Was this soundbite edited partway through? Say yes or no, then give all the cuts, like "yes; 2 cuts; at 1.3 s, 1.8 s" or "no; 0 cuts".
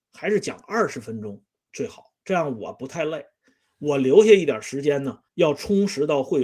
yes; 1 cut; at 5.3 s